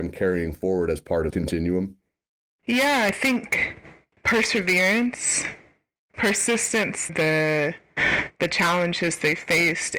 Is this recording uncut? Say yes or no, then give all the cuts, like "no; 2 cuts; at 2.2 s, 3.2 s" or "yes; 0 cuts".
no; 2 cuts; at 1.3 s, 7.1 s